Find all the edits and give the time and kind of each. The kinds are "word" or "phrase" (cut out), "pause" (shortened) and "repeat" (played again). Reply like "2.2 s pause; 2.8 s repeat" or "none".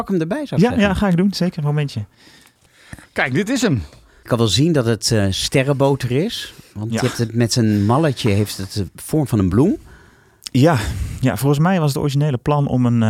none